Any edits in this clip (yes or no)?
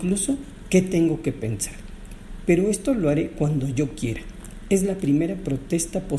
no